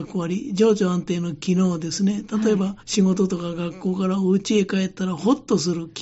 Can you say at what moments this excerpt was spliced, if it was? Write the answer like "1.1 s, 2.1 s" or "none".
2.8 s

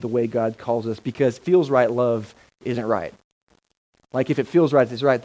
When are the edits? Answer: 1.4 s

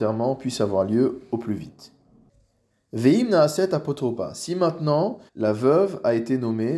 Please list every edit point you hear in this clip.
5.3 s

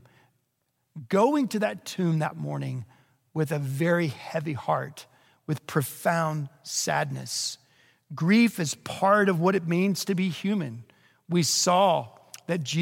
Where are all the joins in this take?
none

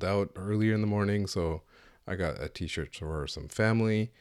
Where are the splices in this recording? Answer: none

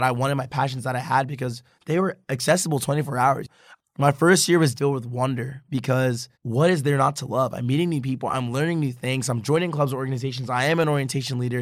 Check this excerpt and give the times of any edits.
2.2 s, 4.8 s, 6.3 s

